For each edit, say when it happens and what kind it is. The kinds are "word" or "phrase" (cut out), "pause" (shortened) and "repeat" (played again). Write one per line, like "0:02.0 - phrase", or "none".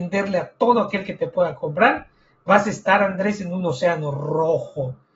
none